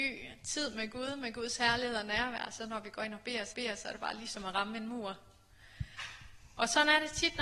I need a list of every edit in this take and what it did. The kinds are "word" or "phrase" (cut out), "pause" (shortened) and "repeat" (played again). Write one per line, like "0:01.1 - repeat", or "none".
0:03.5 - repeat